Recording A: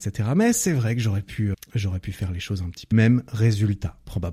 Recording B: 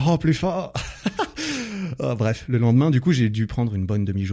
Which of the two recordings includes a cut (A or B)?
A